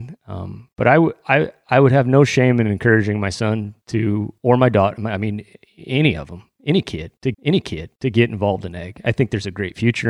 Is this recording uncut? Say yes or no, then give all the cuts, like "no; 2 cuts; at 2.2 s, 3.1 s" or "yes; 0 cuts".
no; 1 cut; at 7.3 s